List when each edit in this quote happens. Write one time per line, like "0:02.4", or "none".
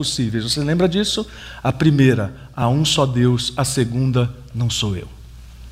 none